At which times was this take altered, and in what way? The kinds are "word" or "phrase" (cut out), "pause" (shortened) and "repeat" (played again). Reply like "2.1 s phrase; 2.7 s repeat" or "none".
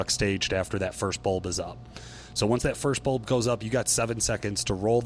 none